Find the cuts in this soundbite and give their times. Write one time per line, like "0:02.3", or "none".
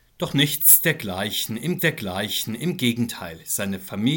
0:01.8